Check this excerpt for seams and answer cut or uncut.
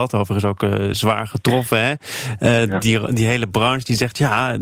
uncut